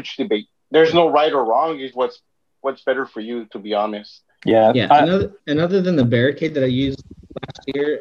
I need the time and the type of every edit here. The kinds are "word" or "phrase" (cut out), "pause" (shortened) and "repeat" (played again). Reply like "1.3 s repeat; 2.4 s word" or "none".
1.9 s word; 5.4 s pause